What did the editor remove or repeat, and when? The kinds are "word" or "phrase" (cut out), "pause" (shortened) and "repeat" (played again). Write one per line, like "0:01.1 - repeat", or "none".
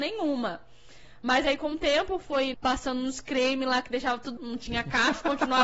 0:02.5 - word
0:04.4 - word